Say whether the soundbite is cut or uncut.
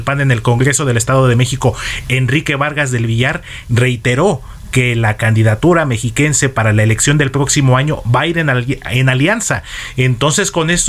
uncut